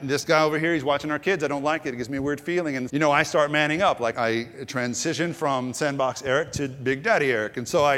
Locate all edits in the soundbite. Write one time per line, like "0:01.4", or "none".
0:02.9
0:04.1